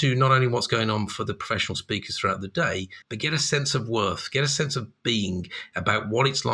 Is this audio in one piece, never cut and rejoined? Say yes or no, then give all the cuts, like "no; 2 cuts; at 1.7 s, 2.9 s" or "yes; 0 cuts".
no; 1 cut; at 3.0 s